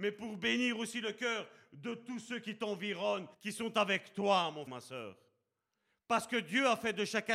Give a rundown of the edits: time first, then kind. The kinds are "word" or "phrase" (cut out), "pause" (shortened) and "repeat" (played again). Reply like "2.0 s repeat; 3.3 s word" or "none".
3.3 s pause; 4.7 s word